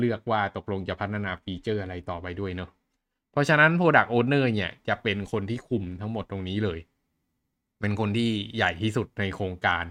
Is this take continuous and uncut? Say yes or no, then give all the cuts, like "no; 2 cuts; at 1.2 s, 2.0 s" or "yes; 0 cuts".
yes; 0 cuts